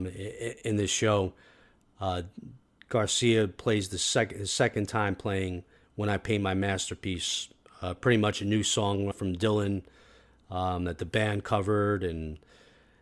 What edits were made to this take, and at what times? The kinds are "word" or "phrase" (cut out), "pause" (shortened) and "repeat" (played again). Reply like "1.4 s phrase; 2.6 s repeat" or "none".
9.1 s word